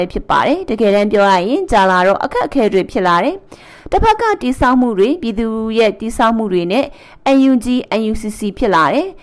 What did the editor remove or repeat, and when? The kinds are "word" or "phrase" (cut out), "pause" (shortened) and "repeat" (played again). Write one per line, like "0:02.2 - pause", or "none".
none